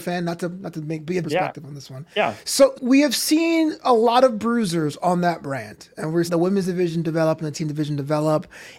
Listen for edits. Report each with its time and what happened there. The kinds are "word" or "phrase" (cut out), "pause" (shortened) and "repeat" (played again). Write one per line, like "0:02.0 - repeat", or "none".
0:01.2 - word
0:02.1 - pause
0:02.7 - word
0:06.3 - word
0:07.5 - word